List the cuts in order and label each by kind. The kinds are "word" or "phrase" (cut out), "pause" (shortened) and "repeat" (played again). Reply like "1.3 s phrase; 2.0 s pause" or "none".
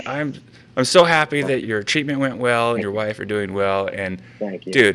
1.6 s phrase; 2.8 s phrase